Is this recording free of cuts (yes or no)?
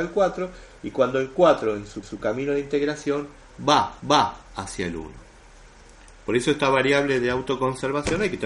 no